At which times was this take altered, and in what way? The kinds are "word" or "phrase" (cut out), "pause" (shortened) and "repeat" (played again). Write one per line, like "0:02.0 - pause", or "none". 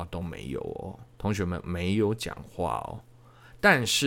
0:01.1 - pause